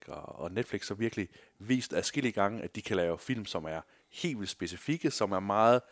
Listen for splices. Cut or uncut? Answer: uncut